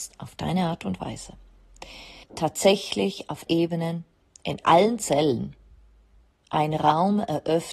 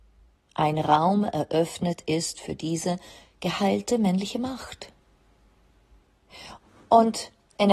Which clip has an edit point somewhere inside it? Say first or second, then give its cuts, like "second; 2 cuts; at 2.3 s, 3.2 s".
first; 3 cuts; at 2.2 s, 3.5 s, 4.6 s